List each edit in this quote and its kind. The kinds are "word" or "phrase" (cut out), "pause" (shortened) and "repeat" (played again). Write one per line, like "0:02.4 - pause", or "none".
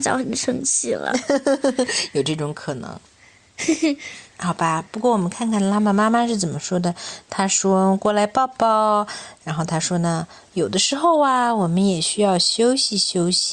0:04.3 - pause